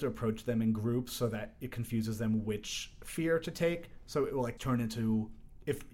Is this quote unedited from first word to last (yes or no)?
no